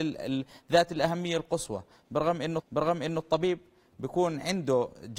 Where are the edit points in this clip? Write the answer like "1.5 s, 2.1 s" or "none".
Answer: 2.6 s